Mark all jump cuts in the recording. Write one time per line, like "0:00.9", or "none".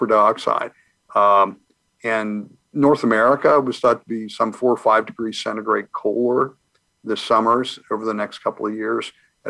0:02.6